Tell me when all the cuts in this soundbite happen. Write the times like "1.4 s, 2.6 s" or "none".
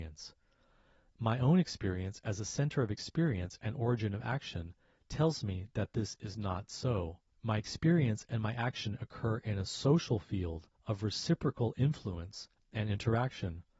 7.3 s, 10.7 s